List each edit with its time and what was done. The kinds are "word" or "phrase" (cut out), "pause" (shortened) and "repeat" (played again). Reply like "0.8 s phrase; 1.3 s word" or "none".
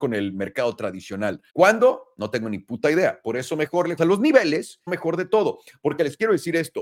1.5 s pause; 4.0 s word; 4.9 s phrase